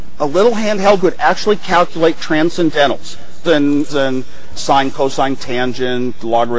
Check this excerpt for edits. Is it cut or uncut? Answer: cut